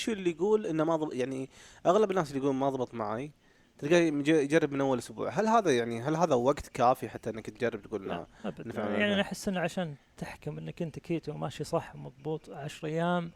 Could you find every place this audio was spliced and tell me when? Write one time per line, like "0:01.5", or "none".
none